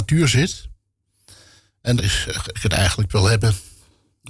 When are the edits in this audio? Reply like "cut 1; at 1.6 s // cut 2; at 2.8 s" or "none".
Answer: cut 1; at 2.0 s // cut 2; at 2.5 s // cut 3; at 3.1 s